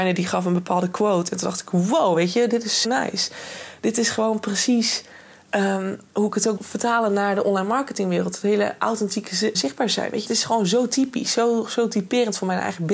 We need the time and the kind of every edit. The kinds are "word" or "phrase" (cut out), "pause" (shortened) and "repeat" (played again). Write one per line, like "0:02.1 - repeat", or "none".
0:02.8 - word
0:06.6 - word
0:09.5 - word
0:10.2 - word